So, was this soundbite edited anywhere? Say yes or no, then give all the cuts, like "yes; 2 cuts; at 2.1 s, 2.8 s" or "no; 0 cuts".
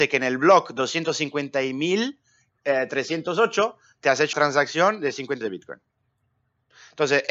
yes; 2 cuts; at 4.3 s, 5.4 s